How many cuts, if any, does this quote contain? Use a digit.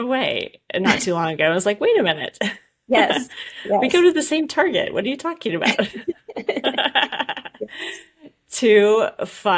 0